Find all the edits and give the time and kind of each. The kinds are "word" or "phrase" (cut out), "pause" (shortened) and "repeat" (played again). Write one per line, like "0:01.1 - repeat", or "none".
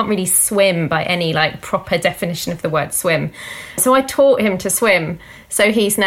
none